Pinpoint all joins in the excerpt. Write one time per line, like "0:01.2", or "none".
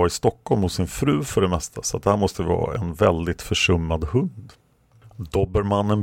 none